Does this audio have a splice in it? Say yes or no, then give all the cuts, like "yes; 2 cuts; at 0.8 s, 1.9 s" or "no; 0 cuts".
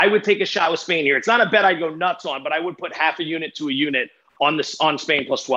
no; 0 cuts